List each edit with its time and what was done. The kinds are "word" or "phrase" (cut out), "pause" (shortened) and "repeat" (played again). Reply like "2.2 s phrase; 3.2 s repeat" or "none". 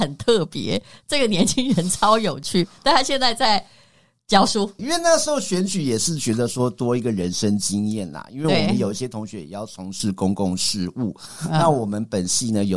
4.8 s phrase